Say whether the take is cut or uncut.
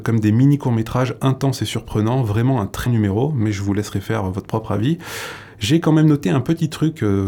cut